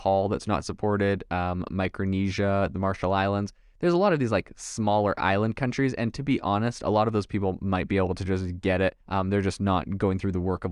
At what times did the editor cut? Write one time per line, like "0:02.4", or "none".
0:09.0